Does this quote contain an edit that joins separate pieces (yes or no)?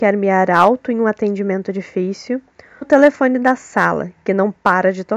yes